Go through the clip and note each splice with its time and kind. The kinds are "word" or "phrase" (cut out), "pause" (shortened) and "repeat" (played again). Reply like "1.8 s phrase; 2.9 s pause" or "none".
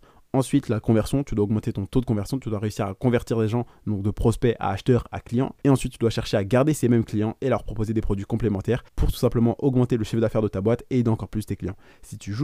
8.9 s pause